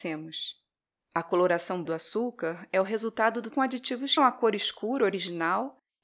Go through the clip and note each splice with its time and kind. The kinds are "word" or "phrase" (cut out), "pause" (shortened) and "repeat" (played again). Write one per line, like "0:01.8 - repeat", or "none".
0:01.9 - word
0:03.5 - word
0:04.2 - phrase

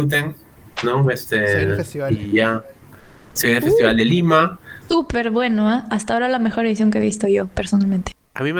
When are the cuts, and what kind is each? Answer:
none

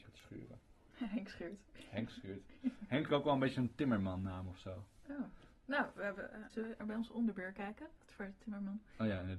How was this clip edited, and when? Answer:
0:03.1 - phrase
0:06.5 - word
0:06.8 - word

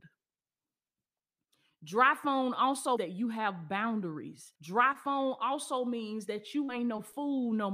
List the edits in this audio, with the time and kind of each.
0:03.0 - word
0:04.6 - pause

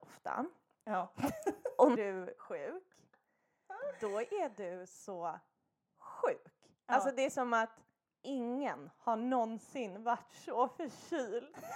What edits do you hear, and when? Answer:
0:01.9 - word
0:02.4 - word

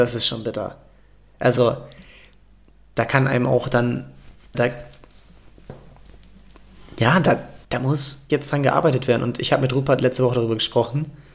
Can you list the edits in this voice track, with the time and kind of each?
0:04.5 - word
0:07.6 - pause
0:08.3 - word

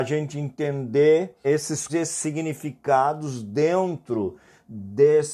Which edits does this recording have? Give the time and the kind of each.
0:01.4 - word
0:01.9 - word

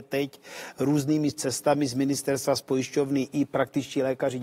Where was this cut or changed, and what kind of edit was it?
none

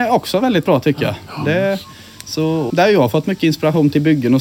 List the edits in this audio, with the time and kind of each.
0:02.7 - word

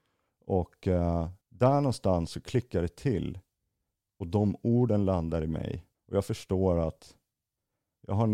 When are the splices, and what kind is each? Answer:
0:01.4 - pause
0:05.9 - pause

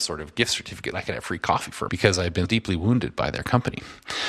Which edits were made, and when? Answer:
0:00.9 - word
0:01.9 - phrase
0:02.5 - word

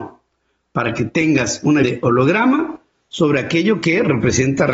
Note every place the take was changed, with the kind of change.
0:01.8 - word

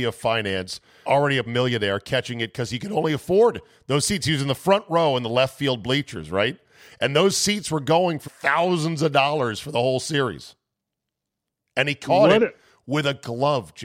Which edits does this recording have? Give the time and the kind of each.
0:01.1 - word
0:01.5 - word
0:08.3 - word

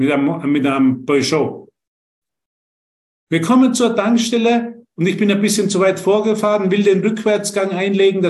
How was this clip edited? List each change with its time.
none

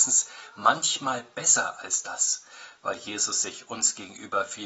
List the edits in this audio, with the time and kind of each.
none

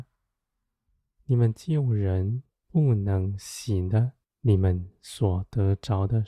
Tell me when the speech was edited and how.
0:02.5 - pause
0:04.2 - pause

